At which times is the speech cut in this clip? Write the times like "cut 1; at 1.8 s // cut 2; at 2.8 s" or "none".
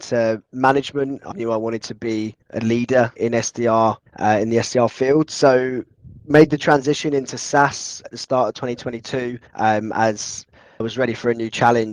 cut 1; at 1.3 s // cut 2; at 2.4 s // cut 3; at 3.2 s // cut 4; at 4.1 s // cut 5; at 8.0 s // cut 6; at 9.5 s // cut 7; at 10.8 s